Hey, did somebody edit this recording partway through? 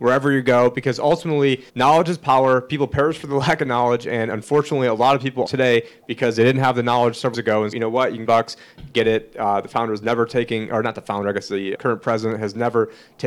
yes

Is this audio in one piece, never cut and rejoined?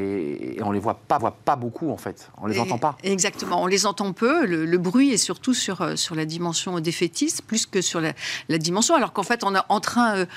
no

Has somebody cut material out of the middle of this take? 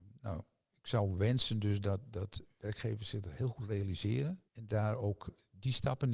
yes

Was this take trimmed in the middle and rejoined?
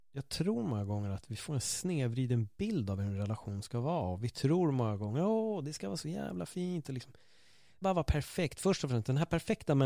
yes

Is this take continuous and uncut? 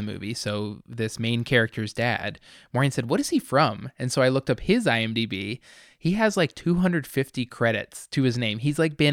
yes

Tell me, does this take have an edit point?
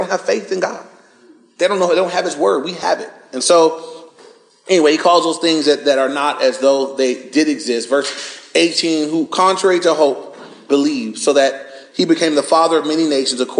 no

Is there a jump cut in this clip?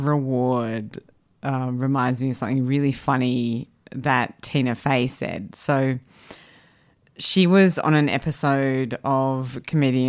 no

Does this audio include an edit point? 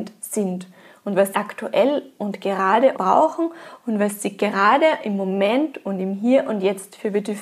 yes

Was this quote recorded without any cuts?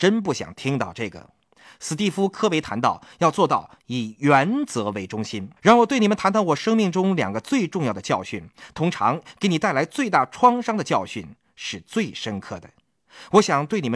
no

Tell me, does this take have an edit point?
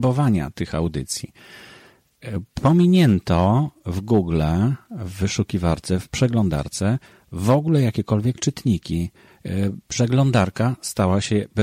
no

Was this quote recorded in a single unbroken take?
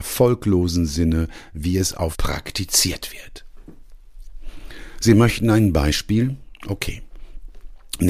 no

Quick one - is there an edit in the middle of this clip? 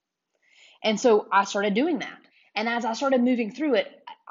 yes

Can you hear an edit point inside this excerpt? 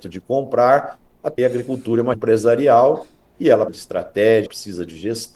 yes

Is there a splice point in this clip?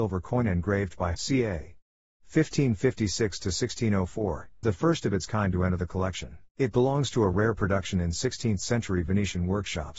yes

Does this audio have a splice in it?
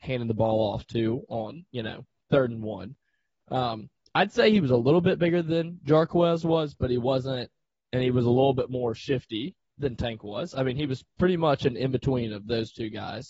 no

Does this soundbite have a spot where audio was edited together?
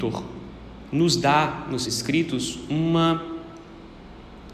yes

